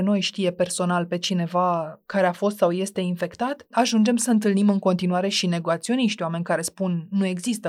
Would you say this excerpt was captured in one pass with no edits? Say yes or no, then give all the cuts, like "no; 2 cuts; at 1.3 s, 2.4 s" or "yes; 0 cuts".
yes; 0 cuts